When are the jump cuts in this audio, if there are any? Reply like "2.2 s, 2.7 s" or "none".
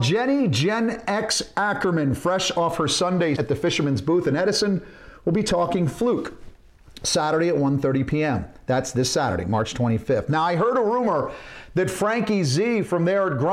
3.3 s